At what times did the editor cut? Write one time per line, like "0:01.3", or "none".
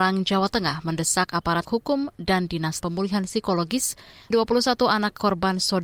0:01.6
0:02.8
0:04.3